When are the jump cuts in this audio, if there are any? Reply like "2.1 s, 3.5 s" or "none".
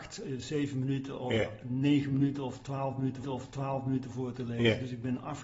3.2 s